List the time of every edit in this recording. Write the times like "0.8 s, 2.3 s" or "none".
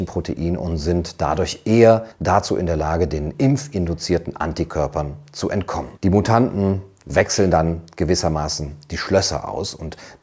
2.1 s, 6.0 s